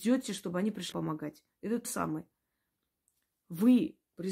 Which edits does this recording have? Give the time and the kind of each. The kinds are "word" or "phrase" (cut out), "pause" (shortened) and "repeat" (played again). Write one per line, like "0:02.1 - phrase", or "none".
0:00.9 - word
0:01.8 - word